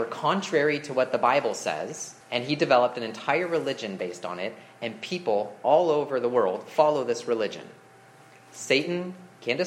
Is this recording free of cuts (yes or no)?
no